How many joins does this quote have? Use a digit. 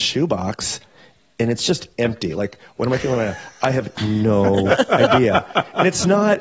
0